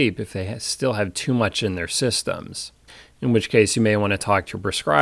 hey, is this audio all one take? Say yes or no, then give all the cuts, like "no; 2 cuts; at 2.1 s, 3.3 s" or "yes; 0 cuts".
no; 1 cut; at 2.9 s